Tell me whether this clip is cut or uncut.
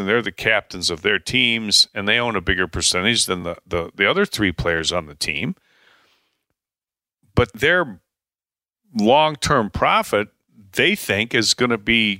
uncut